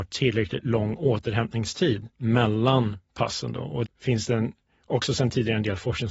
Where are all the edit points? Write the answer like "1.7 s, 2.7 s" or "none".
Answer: 2.1 s, 3.9 s

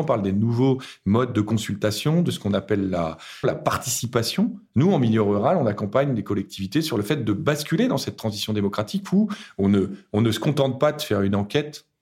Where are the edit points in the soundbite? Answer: 3.4 s

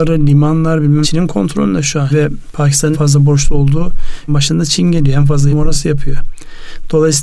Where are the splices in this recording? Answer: 1.0 s, 2.1 s, 2.9 s, 4.3 s, 5.5 s

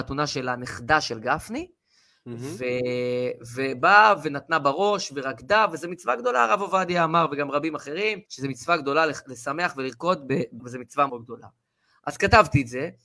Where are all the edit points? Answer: 8.3 s, 10.6 s, 11.1 s

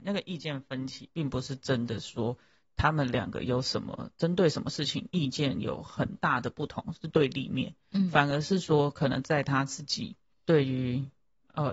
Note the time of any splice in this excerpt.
10.3 s

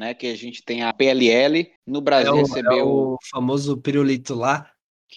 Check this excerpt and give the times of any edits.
0.9 s, 1.8 s, 2.4 s

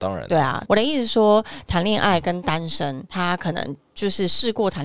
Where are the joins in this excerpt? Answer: 3.1 s

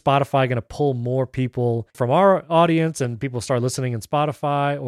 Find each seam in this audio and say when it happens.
1.9 s

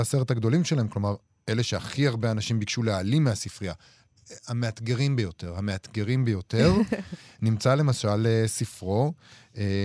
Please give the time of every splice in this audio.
none

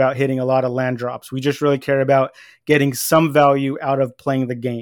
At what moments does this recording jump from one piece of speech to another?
none

